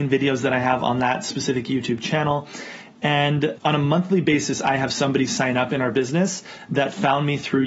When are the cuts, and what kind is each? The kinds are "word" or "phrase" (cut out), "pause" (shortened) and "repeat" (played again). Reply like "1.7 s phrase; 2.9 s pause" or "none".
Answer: 3.6 s word